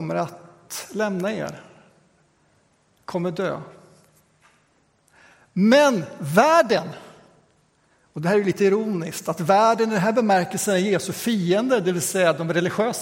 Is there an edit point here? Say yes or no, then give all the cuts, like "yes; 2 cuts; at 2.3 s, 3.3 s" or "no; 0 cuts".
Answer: no; 0 cuts